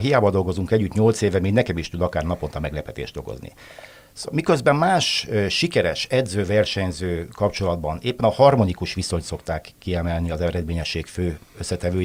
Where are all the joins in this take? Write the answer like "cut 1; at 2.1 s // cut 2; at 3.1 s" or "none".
none